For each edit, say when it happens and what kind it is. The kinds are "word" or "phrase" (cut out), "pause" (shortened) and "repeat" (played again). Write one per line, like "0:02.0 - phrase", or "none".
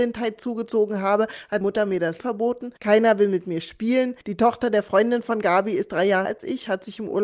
0:01.6 - word
0:02.2 - word
0:02.8 - pause
0:04.2 - pause
0:06.2 - word